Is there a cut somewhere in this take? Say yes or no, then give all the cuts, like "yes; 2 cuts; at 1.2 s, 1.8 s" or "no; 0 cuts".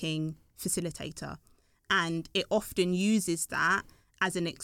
no; 0 cuts